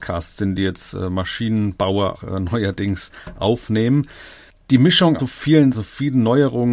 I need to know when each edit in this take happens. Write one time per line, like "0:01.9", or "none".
0:02.1
0:05.2
0:05.7